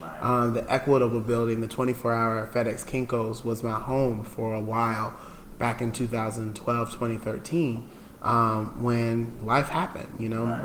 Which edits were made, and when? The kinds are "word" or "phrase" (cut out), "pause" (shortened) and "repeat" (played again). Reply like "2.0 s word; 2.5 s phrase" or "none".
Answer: none